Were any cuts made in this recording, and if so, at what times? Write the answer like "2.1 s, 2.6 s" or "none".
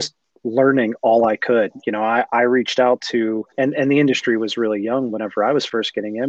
3.5 s